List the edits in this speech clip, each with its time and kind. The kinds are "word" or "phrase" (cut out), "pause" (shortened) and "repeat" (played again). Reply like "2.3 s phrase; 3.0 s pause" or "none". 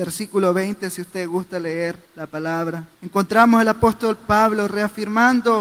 2.0 s pause; 2.9 s pause